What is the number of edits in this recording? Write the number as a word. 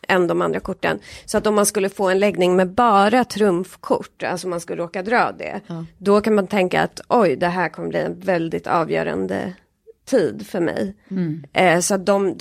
one